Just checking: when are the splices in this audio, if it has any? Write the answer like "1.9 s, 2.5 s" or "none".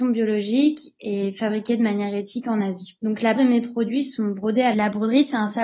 3.4 s, 4.7 s